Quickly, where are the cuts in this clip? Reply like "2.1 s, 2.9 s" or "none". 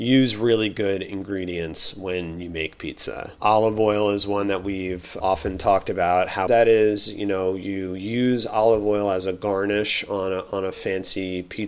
6.5 s